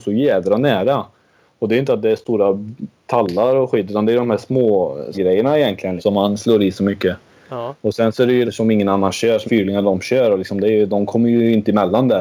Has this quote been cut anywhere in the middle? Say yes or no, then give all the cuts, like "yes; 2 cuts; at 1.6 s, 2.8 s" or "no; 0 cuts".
yes; 4 cuts; at 5.1 s, 6.0 s, 8.5 s, 9.5 s